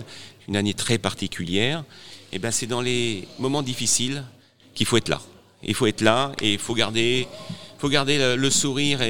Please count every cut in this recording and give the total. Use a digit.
0